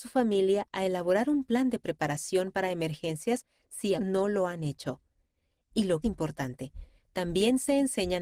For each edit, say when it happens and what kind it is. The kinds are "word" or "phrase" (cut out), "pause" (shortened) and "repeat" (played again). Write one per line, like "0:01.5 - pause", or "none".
0:04.0 - word
0:06.0 - phrase